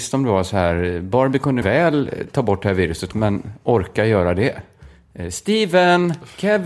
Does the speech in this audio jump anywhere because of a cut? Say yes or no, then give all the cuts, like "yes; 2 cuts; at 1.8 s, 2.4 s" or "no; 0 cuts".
yes; 2 cuts; at 1.6 s, 3.1 s